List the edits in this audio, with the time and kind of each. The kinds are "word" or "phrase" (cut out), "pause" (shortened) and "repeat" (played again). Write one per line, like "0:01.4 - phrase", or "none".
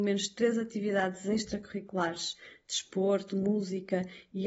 none